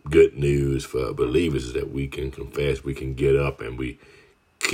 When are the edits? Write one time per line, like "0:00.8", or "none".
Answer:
none